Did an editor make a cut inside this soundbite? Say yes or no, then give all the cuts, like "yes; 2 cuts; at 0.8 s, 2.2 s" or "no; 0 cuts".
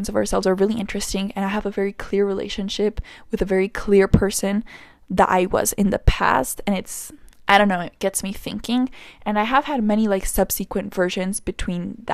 no; 0 cuts